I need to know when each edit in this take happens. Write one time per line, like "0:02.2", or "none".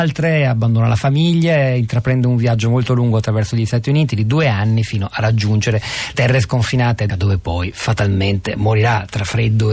0:06.1
0:07.1